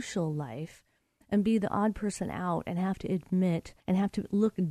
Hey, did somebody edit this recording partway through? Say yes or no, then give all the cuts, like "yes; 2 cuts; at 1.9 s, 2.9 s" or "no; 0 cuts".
yes; 1 cut; at 3.8 s